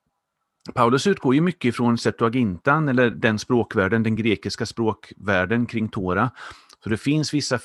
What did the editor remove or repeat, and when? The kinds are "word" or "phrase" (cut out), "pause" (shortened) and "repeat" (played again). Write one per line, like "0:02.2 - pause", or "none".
none